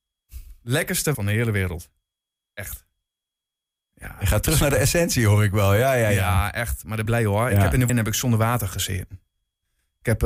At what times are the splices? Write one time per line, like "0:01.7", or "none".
0:01.1
0:07.1
0:07.9